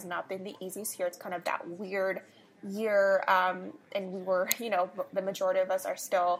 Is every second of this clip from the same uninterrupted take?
yes; 0 cuts

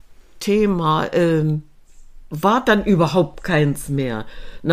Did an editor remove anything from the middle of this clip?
no; 0 cuts

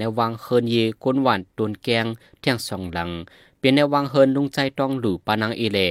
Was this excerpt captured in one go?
yes; 0 cuts

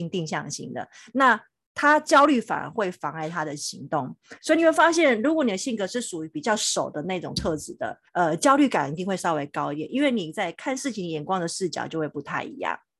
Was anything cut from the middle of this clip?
yes; 1 cut; at 8.1 s

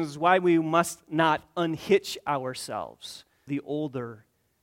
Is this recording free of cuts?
no; 1 cut; at 3.5 s

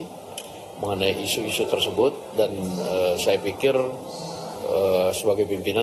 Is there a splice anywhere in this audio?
no; 0 cuts

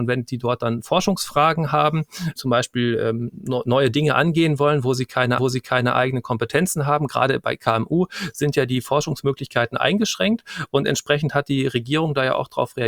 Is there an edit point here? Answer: yes; 2 cuts; at 2.4 s, 5.4 s

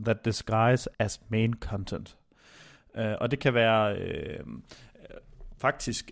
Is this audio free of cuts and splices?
no; 1 cut; at 0.9 s

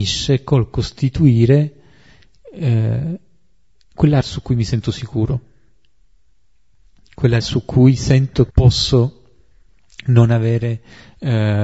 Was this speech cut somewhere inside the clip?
yes; 3 cuts; at 4.2 s, 7.4 s, 8.5 s

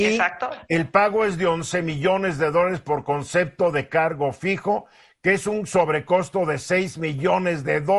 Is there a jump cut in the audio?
no; 0 cuts

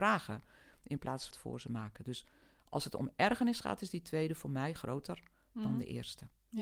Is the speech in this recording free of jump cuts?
no; 1 cut; at 1.3 s

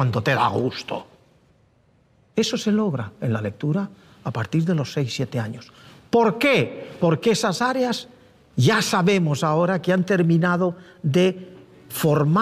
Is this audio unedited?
yes; 0 cuts

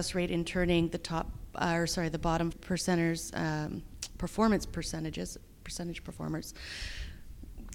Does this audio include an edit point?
yes; 1 cut; at 2.5 s

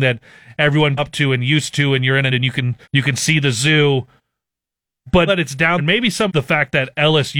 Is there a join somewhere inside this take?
yes; 6 cuts; at 1.0 s, 2.3 s, 2.8 s, 5.3 s, 5.8 s, 6.3 s

